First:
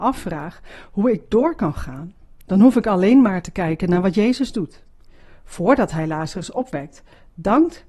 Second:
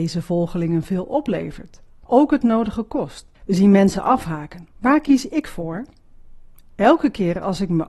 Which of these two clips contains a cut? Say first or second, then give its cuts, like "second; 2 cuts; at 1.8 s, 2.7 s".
second; 3 cuts; at 2.1 s, 3.3 s, 4.7 s